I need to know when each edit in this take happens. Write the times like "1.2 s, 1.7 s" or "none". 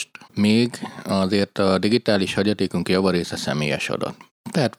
none